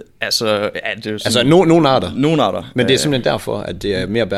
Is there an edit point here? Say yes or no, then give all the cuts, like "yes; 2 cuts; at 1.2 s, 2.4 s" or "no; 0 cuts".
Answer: no; 0 cuts